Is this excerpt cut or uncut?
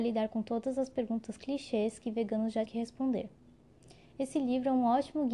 cut